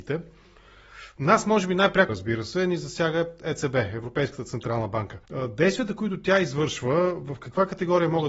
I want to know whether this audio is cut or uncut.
cut